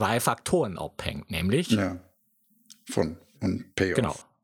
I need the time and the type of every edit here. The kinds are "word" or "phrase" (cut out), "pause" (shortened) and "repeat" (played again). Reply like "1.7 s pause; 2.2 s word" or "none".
3.3 s word